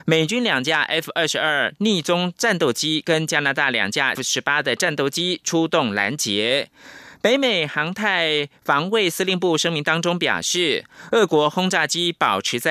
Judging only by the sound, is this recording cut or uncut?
cut